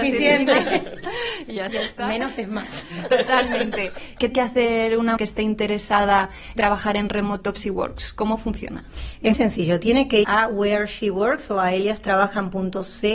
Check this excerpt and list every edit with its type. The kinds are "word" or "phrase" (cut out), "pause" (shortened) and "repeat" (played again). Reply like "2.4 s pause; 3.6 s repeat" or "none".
1.7 s word; 4.3 s word; 5.2 s word; 6.6 s word; 7.6 s word; 9.3 s word; 10.2 s word